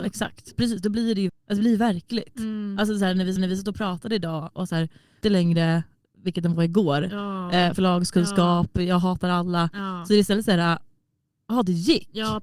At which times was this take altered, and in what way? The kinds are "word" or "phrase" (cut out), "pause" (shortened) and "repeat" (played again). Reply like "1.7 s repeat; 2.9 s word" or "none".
1.3 s word; 3.4 s repeat; 5.2 s phrase; 7.7 s word